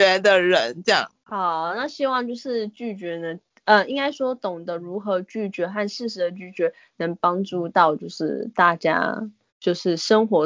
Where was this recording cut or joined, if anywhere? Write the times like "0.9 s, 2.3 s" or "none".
3.5 s, 9.5 s

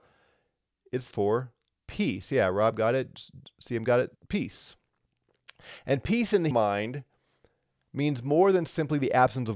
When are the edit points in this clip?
1.1 s, 4.1 s, 6.5 s

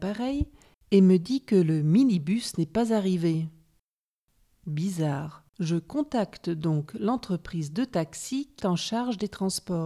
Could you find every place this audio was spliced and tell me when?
5.5 s, 8.6 s

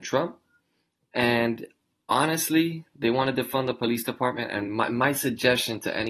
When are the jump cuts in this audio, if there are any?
none

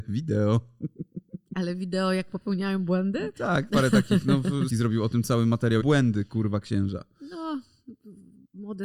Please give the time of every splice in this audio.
3.7 s, 4.7 s, 5.8 s

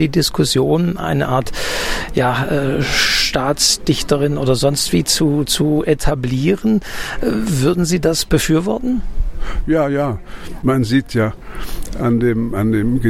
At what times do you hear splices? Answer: none

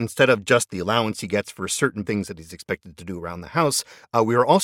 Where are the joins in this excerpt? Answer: 2.1 s

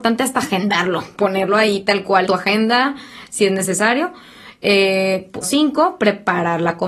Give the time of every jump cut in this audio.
2.3 s, 5.4 s

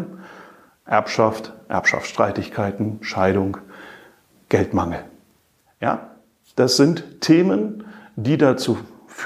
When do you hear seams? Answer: none

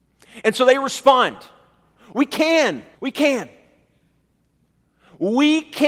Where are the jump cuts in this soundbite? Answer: 2.9 s

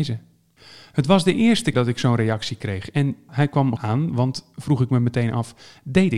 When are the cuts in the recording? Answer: 1.7 s, 3.3 s, 3.8 s

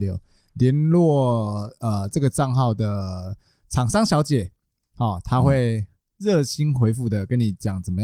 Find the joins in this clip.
none

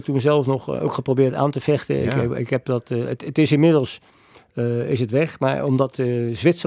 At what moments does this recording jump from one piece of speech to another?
none

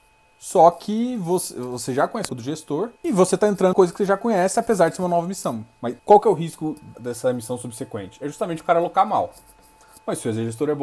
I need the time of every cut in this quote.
2.3 s, 3.0 s, 3.7 s, 6.0 s, 6.9 s

